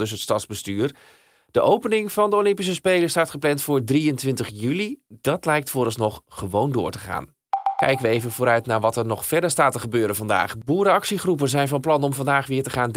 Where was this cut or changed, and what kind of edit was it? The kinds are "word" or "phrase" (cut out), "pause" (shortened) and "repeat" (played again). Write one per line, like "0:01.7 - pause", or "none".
none